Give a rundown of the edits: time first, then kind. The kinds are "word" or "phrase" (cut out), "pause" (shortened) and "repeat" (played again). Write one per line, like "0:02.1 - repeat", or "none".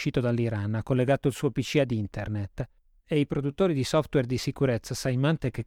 none

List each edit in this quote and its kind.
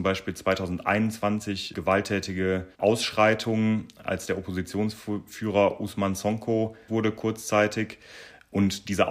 0:02.7 - pause
0:06.9 - word

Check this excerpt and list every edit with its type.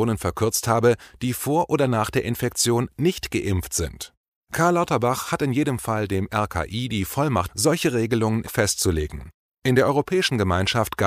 0:07.5 - word
0:08.5 - word

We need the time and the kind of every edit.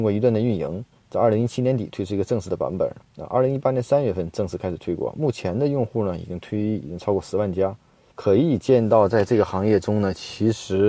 0:00.9 - word
0:08.1 - word

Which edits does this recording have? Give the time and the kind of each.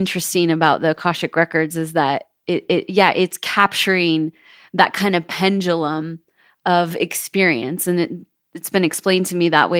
none

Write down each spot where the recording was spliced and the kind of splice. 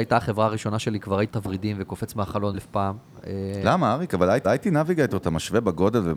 0:01.3 - word
0:02.5 - word
0:04.4 - repeat

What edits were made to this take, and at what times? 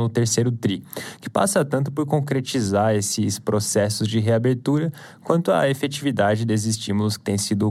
none

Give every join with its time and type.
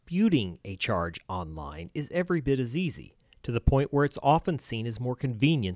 none

